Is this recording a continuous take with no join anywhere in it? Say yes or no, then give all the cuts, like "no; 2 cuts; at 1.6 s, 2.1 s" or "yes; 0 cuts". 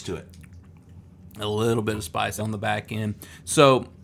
no; 1 cut; at 2.4 s